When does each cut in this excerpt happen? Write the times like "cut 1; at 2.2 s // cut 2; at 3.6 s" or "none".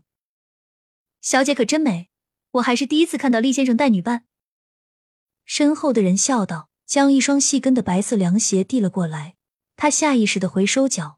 cut 1; at 6.8 s // cut 2; at 9.6 s